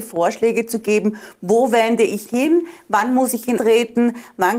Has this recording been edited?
yes; 2 cuts; at 2.3 s, 3.6 s

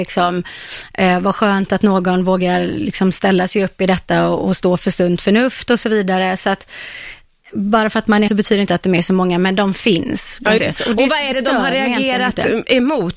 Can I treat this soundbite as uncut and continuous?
no; 2 cuts; at 8.3 s, 10.6 s

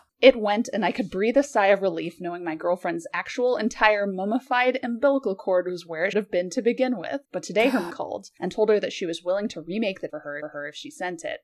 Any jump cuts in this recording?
yes; 5 cuts; at 6.1 s, 7.2 s, 7.9 s, 10.1 s, 10.4 s

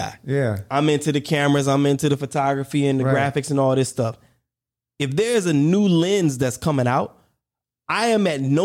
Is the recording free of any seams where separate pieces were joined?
yes; 0 cuts

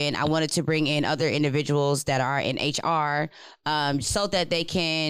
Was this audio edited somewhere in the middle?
no; 0 cuts

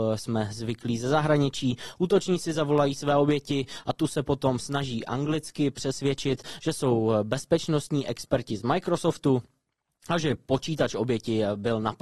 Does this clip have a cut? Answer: no; 0 cuts

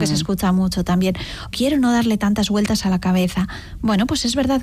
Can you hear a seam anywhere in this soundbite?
yes; 1 cut; at 1.5 s

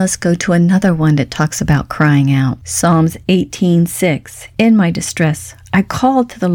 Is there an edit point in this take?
no; 0 cuts

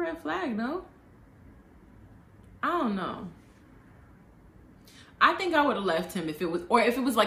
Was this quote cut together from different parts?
no; 0 cuts

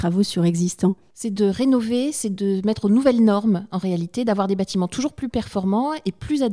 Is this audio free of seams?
yes; 0 cuts

